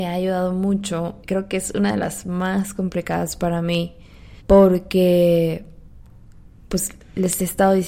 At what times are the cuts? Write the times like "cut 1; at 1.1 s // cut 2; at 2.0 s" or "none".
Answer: cut 1; at 1.2 s // cut 2; at 4.4 s